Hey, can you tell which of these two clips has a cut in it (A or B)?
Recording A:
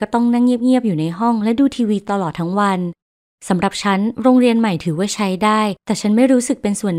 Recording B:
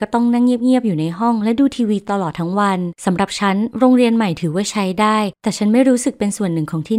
B